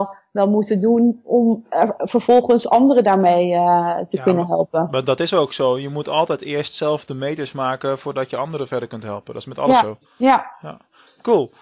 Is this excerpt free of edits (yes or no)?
no